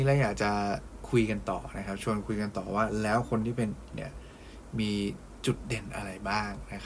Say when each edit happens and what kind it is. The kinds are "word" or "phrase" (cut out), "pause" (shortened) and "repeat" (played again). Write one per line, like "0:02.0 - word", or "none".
0:03.9 - word